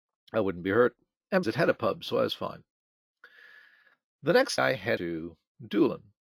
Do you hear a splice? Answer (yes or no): yes